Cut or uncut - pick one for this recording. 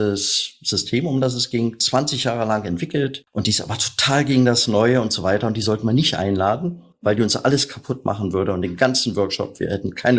uncut